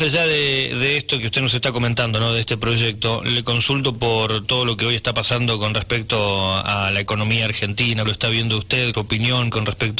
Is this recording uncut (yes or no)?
no